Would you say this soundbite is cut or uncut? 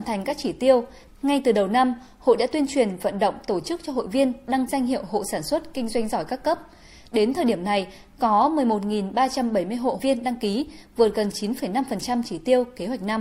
cut